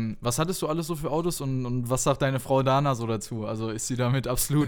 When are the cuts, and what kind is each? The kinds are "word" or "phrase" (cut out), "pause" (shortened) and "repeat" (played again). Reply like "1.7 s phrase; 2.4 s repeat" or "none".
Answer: none

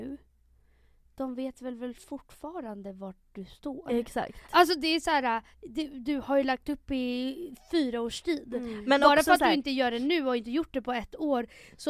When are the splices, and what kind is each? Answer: 5.5 s pause

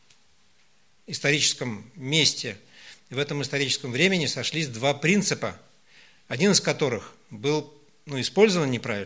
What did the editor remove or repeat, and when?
none

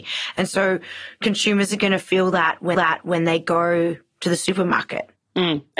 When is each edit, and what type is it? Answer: 2.7 s repeat

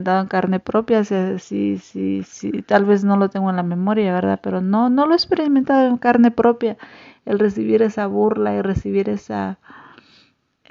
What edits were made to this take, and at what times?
none

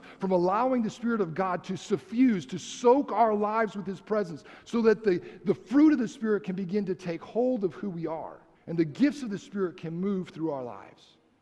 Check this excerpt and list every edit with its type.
8.5 s pause

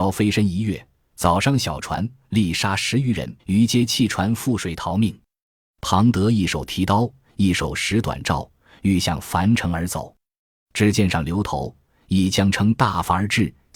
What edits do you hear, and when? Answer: 3.4 s pause

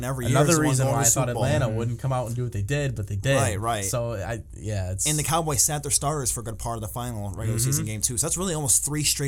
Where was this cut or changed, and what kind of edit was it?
none

